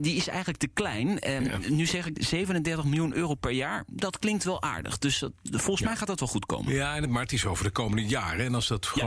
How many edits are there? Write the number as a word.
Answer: zero